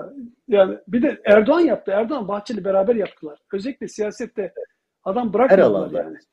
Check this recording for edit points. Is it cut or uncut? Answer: uncut